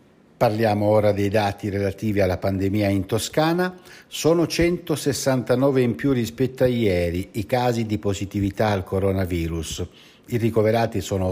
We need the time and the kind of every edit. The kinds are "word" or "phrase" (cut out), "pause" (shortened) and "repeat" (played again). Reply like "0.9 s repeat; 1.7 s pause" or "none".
none